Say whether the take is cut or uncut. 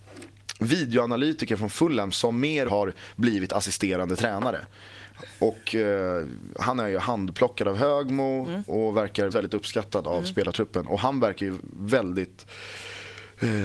cut